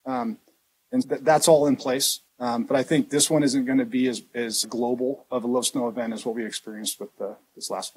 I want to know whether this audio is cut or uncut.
cut